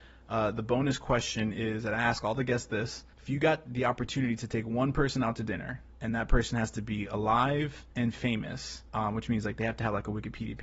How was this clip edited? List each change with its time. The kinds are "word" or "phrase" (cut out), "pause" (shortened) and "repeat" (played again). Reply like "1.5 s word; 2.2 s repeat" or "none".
3.1 s pause; 5.9 s pause; 7.9 s pause; 8.9 s pause